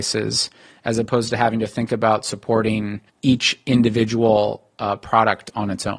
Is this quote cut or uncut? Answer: cut